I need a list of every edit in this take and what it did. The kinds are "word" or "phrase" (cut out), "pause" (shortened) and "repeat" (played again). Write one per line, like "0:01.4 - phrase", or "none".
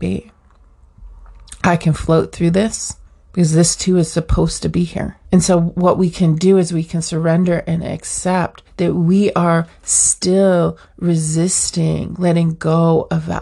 0:03.1 - pause
0:05.2 - pause
0:08.7 - pause